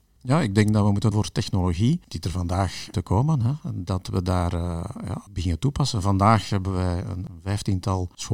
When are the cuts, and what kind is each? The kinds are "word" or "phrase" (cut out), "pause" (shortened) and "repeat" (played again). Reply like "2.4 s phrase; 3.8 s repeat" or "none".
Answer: 1.1 s word; 2.9 s phrase